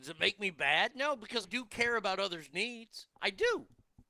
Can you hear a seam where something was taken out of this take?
yes; 2 cuts; at 1.4 s, 3.1 s

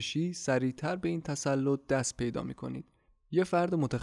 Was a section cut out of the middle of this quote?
no; 0 cuts

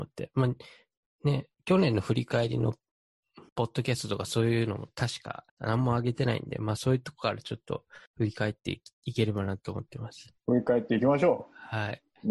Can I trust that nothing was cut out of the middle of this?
no; 5 cuts; at 1.5 s, 3.5 s, 5.5 s, 8.1 s, 10.4 s

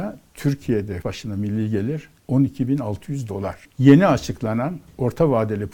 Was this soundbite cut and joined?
yes; 3 cuts; at 1.0 s, 2.2 s, 3.6 s

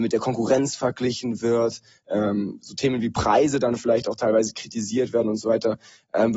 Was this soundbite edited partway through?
no; 0 cuts

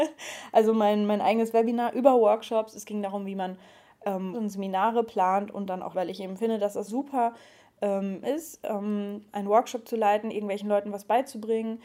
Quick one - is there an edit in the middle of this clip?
yes; 5 cuts; at 4.3 s, 5.9 s, 6.9 s, 8.2 s, 9.3 s

